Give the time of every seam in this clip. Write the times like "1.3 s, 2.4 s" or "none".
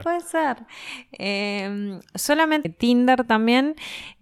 2.6 s